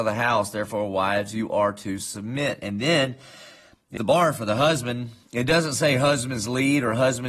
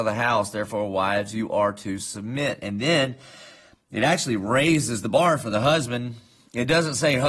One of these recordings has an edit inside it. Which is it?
first; 2 cuts; at 4.0 s, 5.2 s

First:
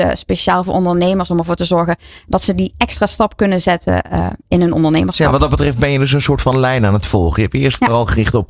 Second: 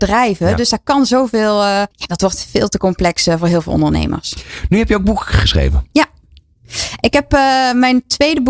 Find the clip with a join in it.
second; 1 cut; at 1.9 s

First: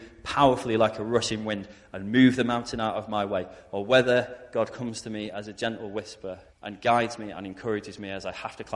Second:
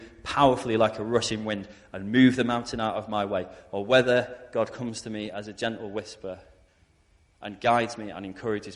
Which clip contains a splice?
first; 1 cut; at 6.5 s

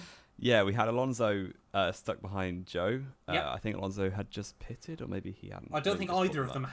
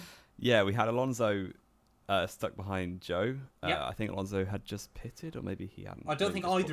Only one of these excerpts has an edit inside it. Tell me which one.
first; 1 cut; at 1.6 s

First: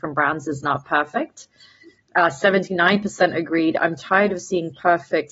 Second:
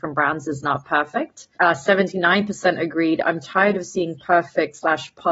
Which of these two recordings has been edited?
second; 1 cut; at 1.5 s

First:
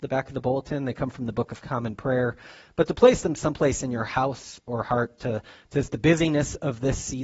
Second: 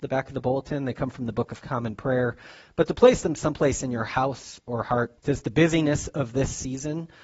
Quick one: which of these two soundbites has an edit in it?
second; 1 cut; at 5.2 s

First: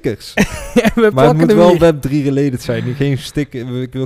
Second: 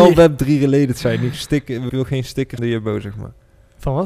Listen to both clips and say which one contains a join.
second; 3 cuts; at 1.3 s, 1.9 s, 2.6 s

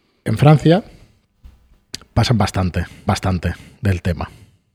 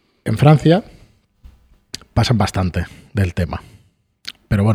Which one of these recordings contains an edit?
first; 1 cut; at 3.1 s

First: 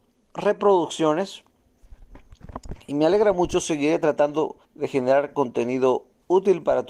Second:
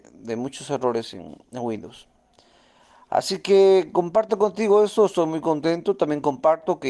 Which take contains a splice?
first; 1 cut; at 4.6 s

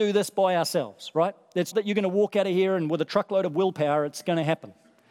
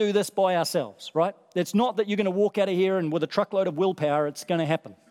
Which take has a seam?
first; 1 cut; at 1.7 s

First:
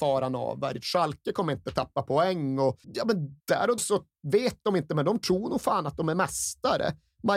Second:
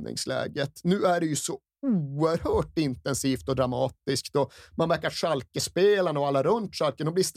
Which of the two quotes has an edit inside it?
first; 3 cuts; at 2.8 s, 3.4 s, 3.8 s

